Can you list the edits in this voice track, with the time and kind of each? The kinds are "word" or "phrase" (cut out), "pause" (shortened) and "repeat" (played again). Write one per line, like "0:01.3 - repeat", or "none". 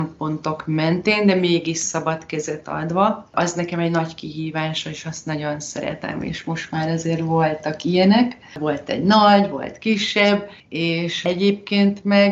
0:10.6 - pause